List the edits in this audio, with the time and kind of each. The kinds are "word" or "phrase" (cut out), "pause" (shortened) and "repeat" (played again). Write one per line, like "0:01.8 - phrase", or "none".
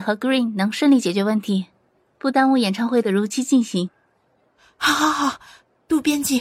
none